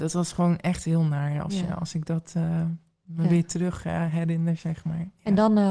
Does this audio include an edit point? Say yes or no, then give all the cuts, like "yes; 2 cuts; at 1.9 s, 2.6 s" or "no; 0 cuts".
no; 0 cuts